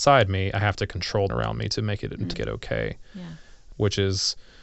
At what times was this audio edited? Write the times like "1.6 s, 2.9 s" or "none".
1.3 s, 2.3 s